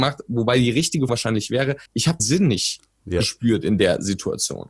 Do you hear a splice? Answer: yes; 3 cuts; at 1.1 s, 1.9 s, 2.2 s

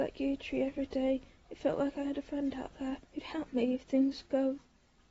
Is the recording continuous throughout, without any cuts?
no; 1 cut; at 3.1 s

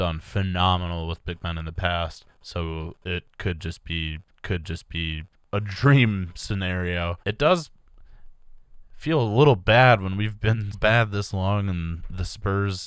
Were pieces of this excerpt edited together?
yes; 4 cuts; at 2.3 s, 4.3 s, 7.2 s, 10.7 s

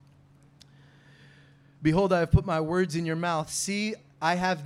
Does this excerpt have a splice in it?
no; 0 cuts

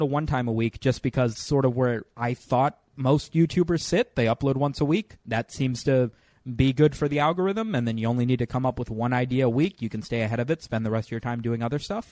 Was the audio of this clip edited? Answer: yes; 2 cuts; at 1.3 s, 5.2 s

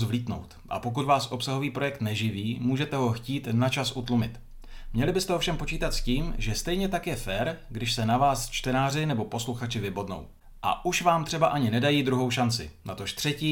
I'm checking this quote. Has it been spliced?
no; 0 cuts

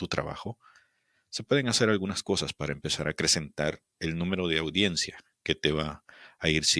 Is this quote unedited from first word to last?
yes; 0 cuts

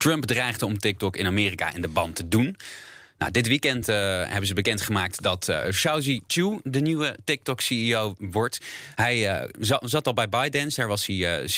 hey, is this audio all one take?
yes; 0 cuts

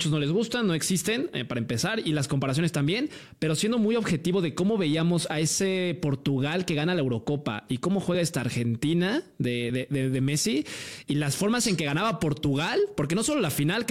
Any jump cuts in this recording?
no; 0 cuts

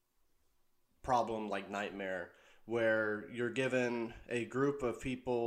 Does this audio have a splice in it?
no; 0 cuts

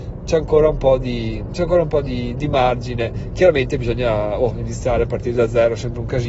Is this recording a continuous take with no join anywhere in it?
yes; 0 cuts

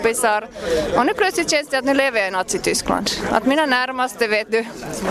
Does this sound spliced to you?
no; 0 cuts

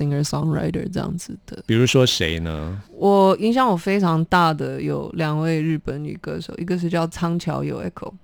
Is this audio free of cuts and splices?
no; 1 cut; at 2.9 s

